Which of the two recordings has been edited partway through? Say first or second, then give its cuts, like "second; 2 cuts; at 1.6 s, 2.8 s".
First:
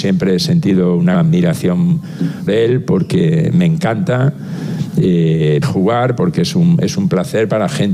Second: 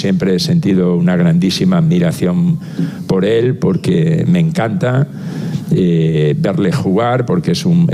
first; 3 cuts; at 1.1 s, 2.5 s, 5.6 s